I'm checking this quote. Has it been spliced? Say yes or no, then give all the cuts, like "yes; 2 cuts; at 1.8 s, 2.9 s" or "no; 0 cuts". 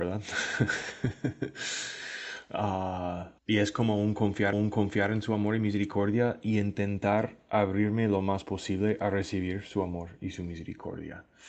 yes; 2 cuts; at 3.4 s, 4.5 s